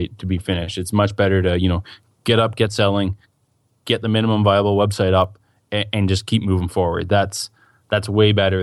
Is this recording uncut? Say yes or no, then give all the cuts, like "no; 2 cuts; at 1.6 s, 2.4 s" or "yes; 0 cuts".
yes; 0 cuts